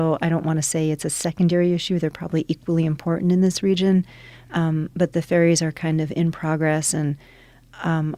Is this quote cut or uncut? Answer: uncut